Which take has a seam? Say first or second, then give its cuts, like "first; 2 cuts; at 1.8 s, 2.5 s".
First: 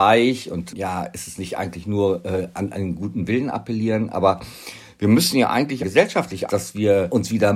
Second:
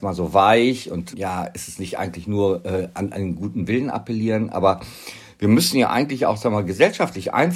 first; 2 cuts; at 5.8 s, 6.5 s